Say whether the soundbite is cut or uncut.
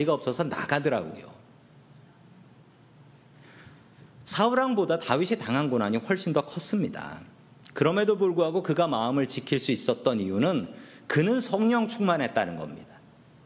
uncut